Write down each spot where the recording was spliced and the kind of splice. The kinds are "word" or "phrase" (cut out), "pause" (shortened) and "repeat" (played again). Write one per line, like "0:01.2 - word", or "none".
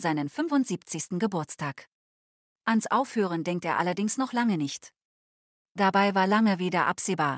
none